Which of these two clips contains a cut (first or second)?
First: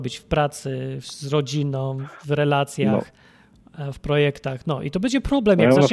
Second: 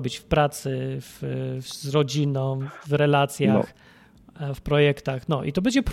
first